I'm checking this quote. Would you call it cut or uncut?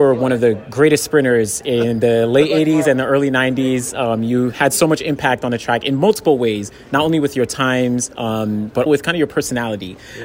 cut